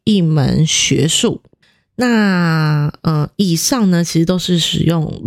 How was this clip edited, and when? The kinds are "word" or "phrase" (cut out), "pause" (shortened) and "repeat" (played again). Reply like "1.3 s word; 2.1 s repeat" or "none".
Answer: 1.6 s pause